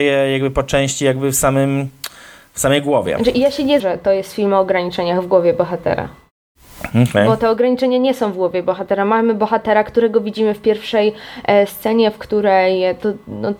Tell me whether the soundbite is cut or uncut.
cut